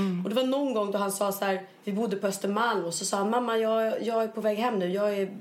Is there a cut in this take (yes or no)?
no